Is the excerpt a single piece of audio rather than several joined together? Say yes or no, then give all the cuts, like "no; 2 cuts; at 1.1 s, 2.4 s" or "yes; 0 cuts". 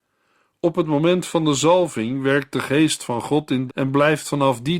no; 1 cut; at 3.7 s